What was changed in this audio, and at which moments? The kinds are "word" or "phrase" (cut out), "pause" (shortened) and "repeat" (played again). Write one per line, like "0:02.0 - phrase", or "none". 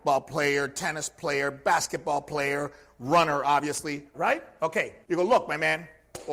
0:04.1 - word
0:05.0 - pause